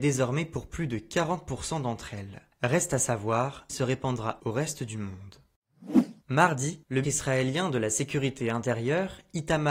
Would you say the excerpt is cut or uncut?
cut